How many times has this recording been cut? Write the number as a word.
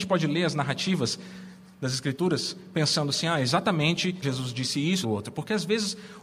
two